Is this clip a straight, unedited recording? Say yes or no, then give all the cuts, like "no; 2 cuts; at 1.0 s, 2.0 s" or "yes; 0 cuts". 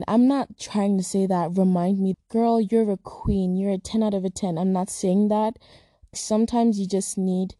no; 2 cuts; at 2.1 s, 6.1 s